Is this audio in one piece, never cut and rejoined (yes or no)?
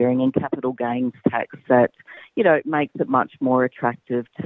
yes